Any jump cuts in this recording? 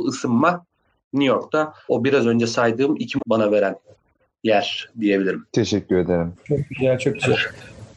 yes; 1 cut; at 3.2 s

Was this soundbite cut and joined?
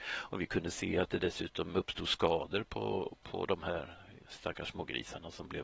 no; 0 cuts

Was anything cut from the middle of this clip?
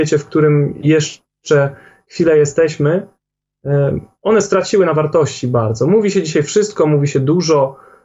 no; 0 cuts

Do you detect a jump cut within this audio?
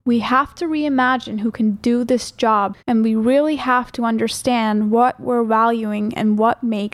yes; 1 cut; at 2.8 s

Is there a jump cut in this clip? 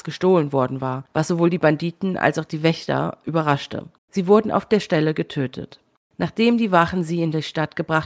yes; 2 cuts; at 4.0 s, 6.0 s

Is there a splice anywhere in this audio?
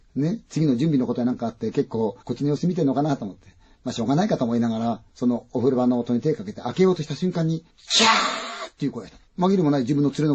yes; 4 cuts; at 2.2 s, 5.1 s, 7.7 s, 9.3 s

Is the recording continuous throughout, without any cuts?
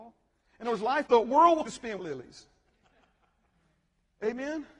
no; 3 cuts; at 1.1 s, 1.7 s, 2.0 s

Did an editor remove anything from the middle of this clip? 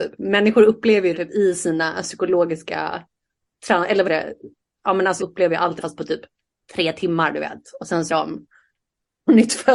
yes; 5 cuts; at 1.1 s, 4.0 s, 5.2 s, 5.8 s, 8.1 s

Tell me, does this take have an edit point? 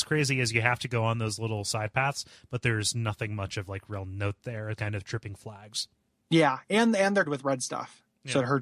yes; 2 cuts; at 4.8 s, 7.3 s

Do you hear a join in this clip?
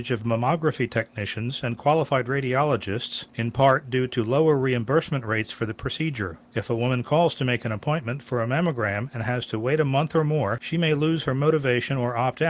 no; 0 cuts

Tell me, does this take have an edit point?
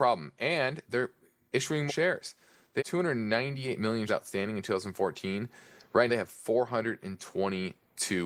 yes; 4 cuts; at 1.9 s, 2.8 s, 4.1 s, 6.1 s

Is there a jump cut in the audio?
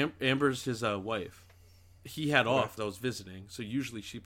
yes; 2 cuts; at 2.0 s, 2.8 s

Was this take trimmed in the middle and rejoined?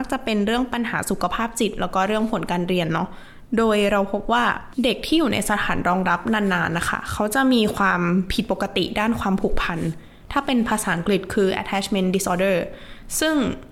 no; 0 cuts

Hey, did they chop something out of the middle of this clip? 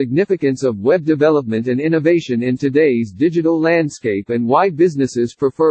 no; 0 cuts

